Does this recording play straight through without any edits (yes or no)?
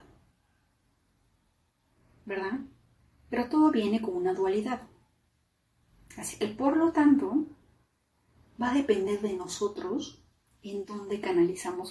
yes